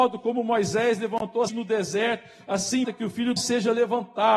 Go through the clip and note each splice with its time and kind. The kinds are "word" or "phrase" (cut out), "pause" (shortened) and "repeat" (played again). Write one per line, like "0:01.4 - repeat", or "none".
0:01.5 - word
0:02.8 - word
0:03.4 - phrase